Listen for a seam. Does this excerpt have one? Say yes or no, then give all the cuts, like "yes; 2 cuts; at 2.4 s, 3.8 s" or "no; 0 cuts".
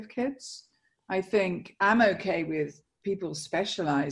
no; 0 cuts